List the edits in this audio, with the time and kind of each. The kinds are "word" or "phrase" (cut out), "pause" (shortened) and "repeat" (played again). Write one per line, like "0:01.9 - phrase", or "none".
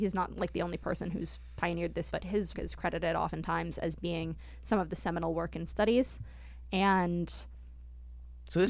0:02.1 - word
0:02.5 - word
0:05.7 - word